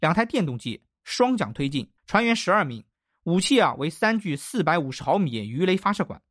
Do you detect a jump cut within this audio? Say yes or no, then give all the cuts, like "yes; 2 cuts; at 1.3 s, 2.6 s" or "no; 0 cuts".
yes; 1 cut; at 2.0 s